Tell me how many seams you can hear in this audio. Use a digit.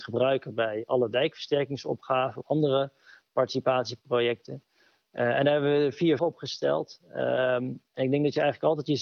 2